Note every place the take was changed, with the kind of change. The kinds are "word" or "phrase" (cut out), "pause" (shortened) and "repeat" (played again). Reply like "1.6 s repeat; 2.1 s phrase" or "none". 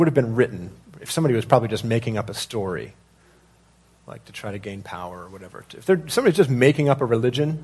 none